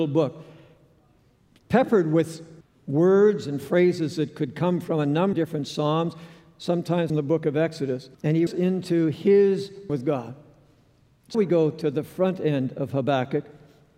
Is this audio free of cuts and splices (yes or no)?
no